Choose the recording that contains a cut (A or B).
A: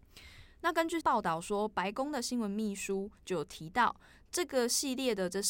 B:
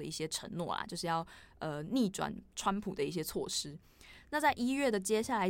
A